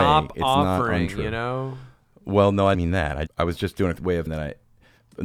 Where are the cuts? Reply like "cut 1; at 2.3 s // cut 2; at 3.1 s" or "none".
cut 1; at 2.7 s // cut 2; at 3.3 s // cut 3; at 4.0 s // cut 4; at 4.3 s